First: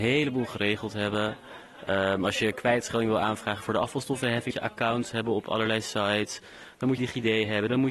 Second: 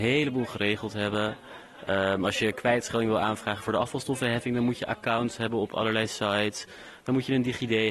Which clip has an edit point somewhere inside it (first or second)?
first